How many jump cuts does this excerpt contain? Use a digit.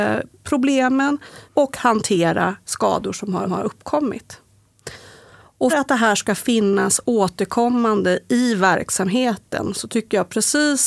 4